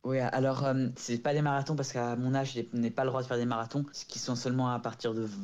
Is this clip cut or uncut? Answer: uncut